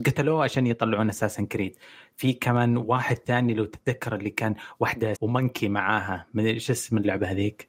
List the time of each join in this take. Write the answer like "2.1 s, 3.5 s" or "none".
5.1 s